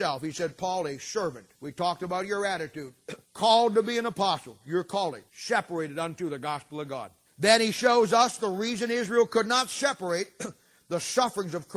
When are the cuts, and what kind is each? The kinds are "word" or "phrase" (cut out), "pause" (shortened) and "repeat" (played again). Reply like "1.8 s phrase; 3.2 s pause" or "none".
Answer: 1.5 s pause; 3.2 s pause; 5.3 s pause; 7.3 s pause